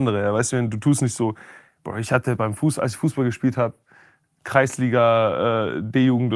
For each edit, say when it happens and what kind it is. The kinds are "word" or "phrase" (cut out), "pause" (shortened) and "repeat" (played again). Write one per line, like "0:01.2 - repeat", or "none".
none